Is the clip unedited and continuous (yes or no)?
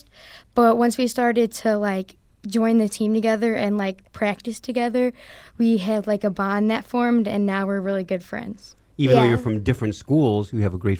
yes